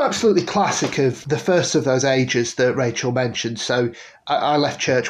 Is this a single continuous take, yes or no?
no